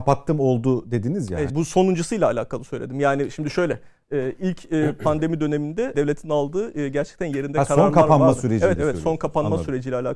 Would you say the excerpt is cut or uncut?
cut